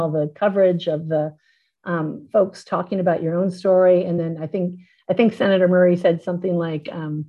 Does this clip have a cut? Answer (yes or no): no